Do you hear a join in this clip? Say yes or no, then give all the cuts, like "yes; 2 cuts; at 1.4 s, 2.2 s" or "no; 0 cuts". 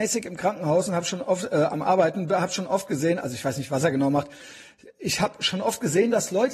no; 0 cuts